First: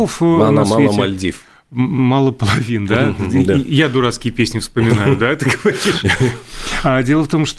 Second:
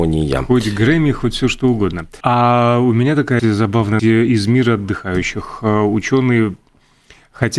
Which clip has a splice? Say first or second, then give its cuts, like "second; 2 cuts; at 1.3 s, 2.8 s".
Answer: second; 3 cuts; at 2.2 s, 3.4 s, 4.0 s